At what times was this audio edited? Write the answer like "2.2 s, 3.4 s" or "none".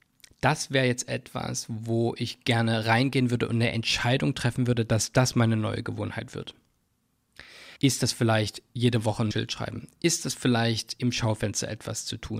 7.8 s, 9.3 s